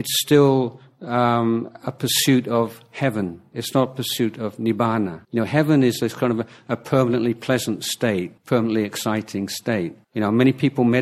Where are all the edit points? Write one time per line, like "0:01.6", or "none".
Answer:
0:05.2
0:08.4
0:10.0